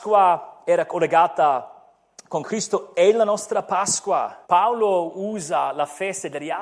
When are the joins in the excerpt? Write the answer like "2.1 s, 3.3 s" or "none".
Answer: 2.4 s, 4.4 s